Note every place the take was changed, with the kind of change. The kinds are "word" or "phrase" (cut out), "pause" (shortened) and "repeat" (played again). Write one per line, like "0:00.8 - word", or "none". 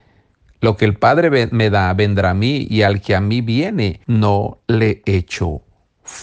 0:04.0 - pause